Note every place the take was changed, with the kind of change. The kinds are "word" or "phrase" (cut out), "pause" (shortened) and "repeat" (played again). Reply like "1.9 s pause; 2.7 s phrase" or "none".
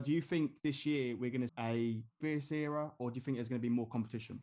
1.5 s word; 2.2 s word

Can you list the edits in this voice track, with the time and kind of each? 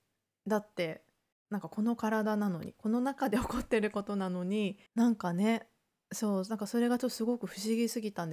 1.3 s pause; 4.9 s pause

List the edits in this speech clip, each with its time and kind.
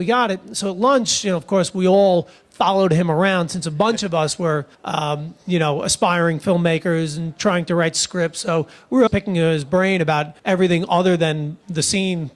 4.7 s pause; 9.1 s word; 10.4 s pause

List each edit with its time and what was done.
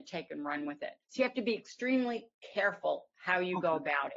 1.0 s pause

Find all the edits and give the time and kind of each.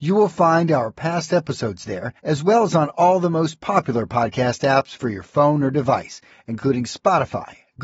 2.2 s pause

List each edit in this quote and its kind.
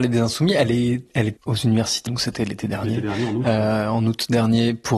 1.4 s word; 2.1 s word

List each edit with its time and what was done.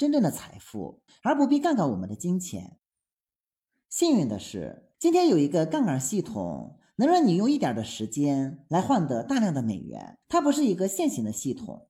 1.1 s pause; 4.9 s pause; 10.2 s pause

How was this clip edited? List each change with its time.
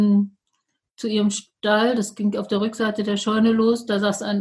none

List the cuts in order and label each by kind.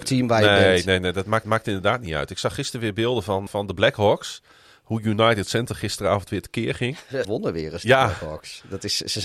1.4 s repeat; 3.5 s word; 7.2 s word

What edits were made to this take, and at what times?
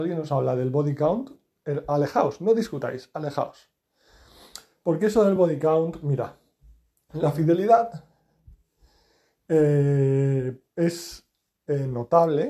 none

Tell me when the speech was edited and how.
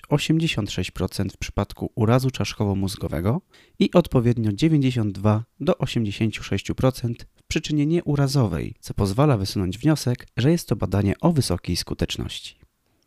3.5 s pause; 8.8 s pause; 10.3 s pause

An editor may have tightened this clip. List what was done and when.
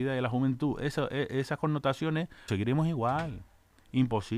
2.5 s word

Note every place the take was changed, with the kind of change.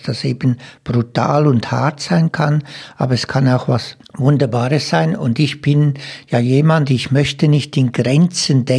4.0 s pause

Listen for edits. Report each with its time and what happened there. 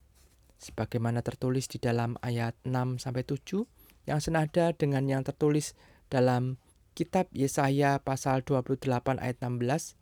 2.6 s pause; 6.7 s pause

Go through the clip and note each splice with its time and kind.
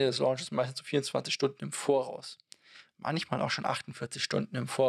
none

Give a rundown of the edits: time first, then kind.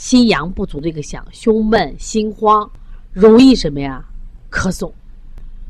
3.1 s phrase

